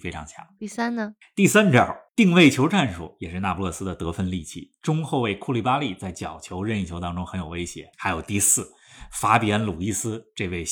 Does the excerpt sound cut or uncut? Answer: cut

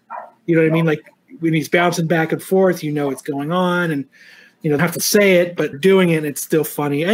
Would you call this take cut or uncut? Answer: cut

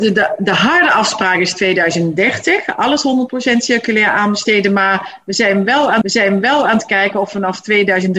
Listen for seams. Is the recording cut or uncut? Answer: cut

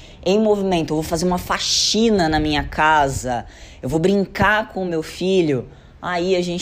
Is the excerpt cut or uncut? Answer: uncut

